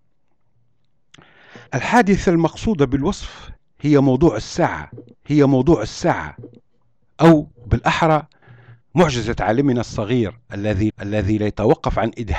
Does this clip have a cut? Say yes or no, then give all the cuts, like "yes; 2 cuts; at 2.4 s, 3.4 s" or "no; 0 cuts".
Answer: yes; 4 cuts; at 1.7 s, 5.2 s, 8.8 s, 10.9 s